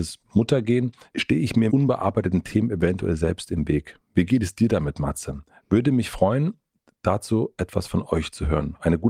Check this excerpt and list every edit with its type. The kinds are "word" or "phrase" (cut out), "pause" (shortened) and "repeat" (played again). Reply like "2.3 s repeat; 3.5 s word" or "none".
1.7 s word